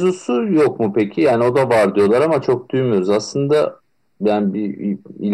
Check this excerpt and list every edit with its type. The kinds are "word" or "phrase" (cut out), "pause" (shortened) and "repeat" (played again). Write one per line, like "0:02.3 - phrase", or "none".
none